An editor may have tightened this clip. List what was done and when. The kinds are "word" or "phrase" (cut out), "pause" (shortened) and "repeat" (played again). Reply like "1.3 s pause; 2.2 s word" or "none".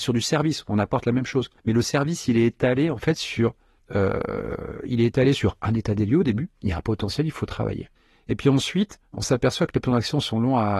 1.6 s pause; 3.8 s pause; 8.0 s pause; 9.0 s pause